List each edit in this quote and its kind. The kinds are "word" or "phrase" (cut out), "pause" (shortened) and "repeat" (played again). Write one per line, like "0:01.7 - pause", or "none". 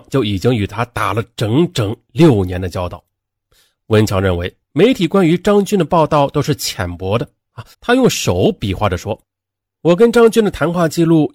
0:07.7 - pause